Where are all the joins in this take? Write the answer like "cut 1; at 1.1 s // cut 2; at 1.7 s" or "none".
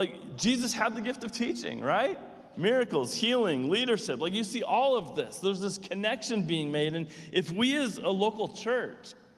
none